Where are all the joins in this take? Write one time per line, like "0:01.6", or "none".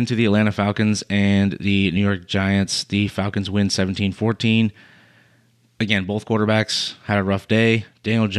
none